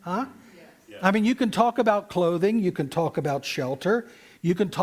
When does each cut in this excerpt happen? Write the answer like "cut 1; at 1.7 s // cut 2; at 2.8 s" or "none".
none